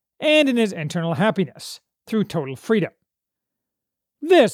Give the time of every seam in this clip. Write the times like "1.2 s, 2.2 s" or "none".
none

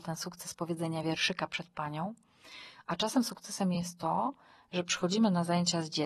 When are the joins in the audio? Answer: none

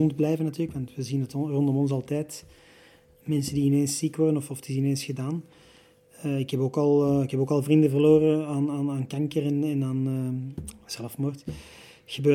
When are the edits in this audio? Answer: none

